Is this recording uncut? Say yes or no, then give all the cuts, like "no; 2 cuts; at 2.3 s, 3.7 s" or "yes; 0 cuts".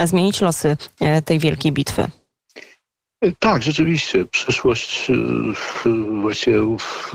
yes; 0 cuts